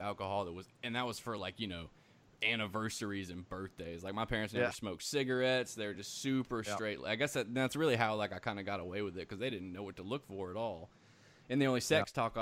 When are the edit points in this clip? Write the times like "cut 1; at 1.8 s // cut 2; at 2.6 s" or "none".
none